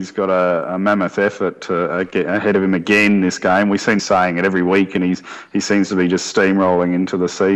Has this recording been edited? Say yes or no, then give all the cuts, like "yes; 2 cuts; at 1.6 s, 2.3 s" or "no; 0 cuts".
yes; 1 cut; at 4.0 s